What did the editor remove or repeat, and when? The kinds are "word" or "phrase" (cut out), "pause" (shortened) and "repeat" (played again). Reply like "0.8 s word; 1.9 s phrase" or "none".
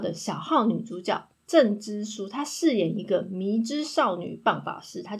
1.3 s pause